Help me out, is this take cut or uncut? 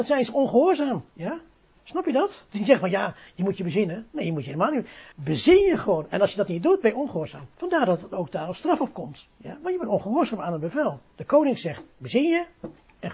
cut